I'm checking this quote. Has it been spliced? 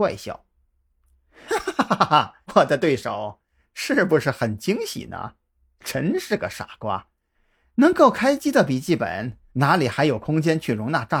yes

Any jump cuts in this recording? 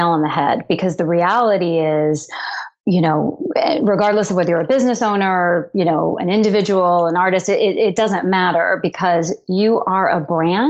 no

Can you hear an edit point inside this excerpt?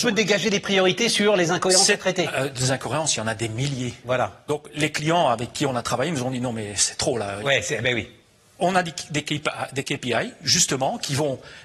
no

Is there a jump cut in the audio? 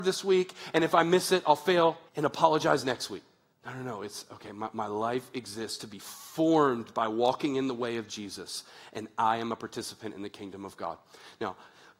yes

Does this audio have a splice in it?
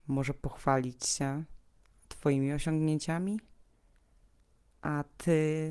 no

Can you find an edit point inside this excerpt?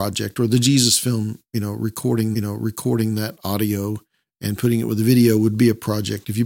yes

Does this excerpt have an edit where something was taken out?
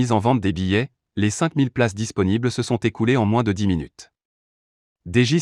no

